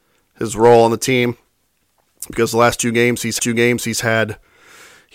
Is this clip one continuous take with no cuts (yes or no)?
no